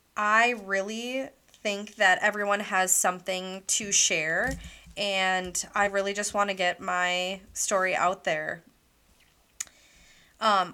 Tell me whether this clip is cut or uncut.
uncut